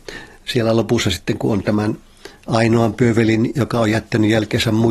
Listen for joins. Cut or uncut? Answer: uncut